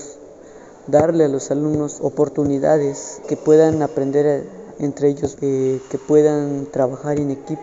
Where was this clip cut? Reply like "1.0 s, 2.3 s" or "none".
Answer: 2.0 s, 3.2 s, 4.7 s, 5.3 s